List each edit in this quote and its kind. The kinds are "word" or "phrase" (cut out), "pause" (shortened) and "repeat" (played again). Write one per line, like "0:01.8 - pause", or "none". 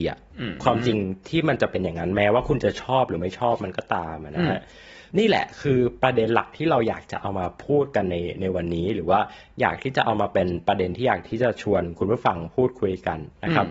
none